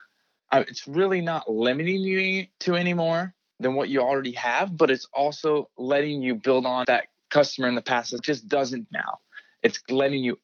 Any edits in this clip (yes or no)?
yes